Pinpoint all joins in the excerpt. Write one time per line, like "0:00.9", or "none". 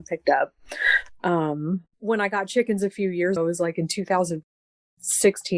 0:01.9
0:03.4